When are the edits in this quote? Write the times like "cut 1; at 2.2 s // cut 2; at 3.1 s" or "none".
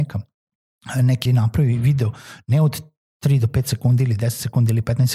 cut 1; at 1.3 s